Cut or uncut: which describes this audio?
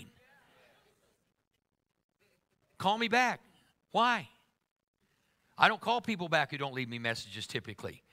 uncut